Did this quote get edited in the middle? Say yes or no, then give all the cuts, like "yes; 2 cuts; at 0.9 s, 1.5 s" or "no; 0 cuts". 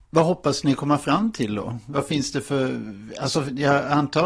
no; 0 cuts